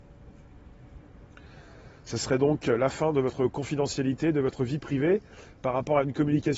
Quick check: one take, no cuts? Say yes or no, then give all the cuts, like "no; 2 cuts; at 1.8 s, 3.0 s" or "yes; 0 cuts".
yes; 0 cuts